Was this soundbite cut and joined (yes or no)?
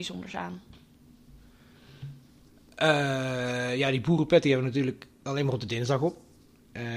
no